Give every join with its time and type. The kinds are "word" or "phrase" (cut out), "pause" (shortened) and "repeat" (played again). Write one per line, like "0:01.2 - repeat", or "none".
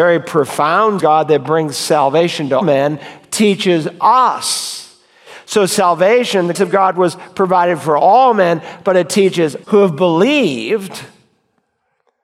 0:01.0 - phrase
0:02.6 - word
0:06.5 - word
0:09.6 - word